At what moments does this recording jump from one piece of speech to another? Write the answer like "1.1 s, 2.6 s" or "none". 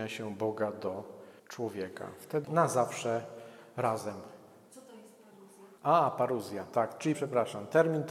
1.4 s, 2.4 s, 5.8 s, 7.1 s